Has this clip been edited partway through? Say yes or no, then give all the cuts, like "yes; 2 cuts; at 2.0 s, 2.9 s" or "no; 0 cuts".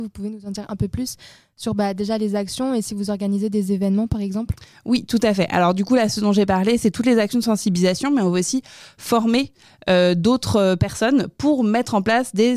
no; 0 cuts